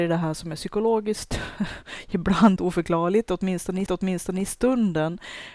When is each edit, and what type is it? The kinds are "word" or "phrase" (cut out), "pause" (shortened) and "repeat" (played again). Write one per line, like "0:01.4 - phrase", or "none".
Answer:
0:02.6 - word
0:03.9 - repeat